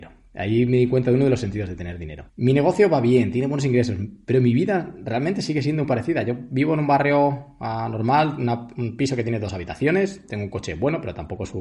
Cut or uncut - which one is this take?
cut